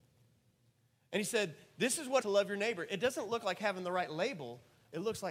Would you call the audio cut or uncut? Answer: cut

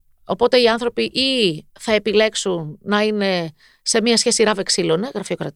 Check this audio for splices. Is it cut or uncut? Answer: uncut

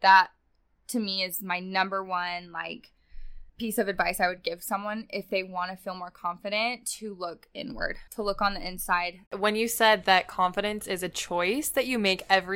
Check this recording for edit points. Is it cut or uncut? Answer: cut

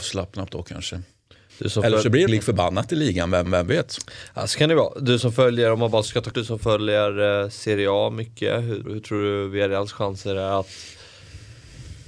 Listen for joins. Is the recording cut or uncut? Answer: cut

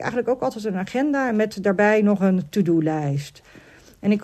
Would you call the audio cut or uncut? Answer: uncut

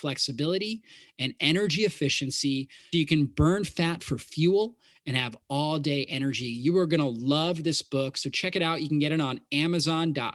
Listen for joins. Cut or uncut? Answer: cut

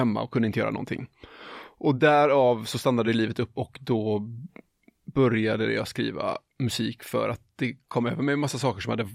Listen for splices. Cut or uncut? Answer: uncut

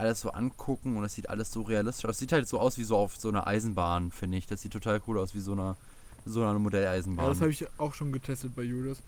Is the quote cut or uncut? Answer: uncut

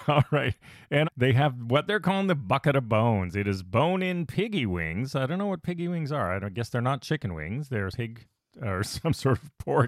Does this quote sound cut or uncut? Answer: cut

